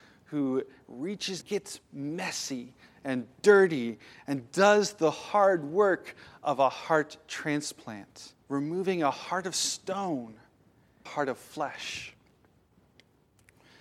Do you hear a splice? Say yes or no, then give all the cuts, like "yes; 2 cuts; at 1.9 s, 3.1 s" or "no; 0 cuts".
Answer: yes; 3 cuts; at 1.4 s, 8.4 s, 11.1 s